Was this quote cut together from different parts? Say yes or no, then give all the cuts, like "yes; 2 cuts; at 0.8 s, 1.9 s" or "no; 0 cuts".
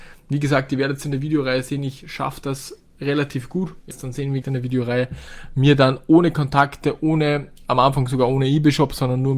yes; 2 cuts; at 3.9 s, 4.4 s